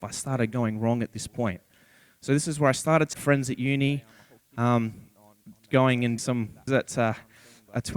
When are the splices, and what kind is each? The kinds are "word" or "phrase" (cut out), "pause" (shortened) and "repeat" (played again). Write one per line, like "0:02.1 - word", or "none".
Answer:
0:03.1 - word
0:06.2 - word
0:06.7 - word